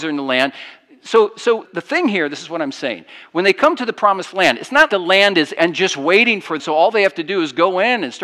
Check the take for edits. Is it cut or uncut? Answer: cut